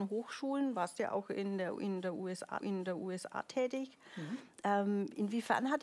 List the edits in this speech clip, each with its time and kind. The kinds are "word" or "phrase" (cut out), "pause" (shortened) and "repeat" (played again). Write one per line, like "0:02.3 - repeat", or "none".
0:02.6 - repeat